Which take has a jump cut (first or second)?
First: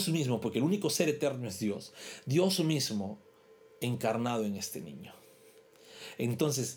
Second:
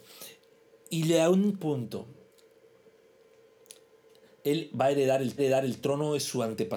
second